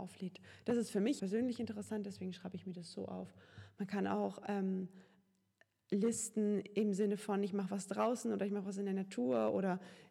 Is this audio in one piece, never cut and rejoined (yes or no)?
no